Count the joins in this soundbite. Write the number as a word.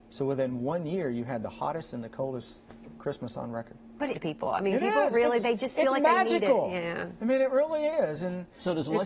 one